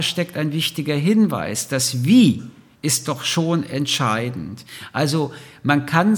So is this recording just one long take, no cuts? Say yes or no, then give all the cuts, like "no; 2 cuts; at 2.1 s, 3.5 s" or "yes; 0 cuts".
yes; 0 cuts